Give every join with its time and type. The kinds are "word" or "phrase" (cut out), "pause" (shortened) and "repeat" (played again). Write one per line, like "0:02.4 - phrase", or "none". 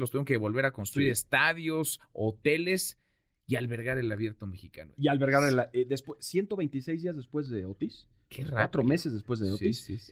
none

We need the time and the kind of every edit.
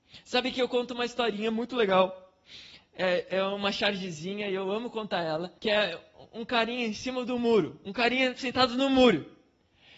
0:05.6 - pause

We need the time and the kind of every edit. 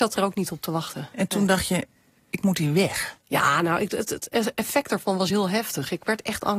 none

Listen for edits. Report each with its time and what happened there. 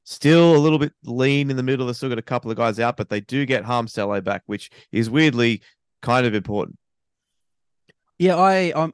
none

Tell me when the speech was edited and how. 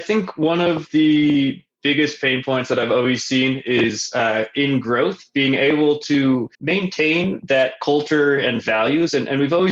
0:06.5 - pause

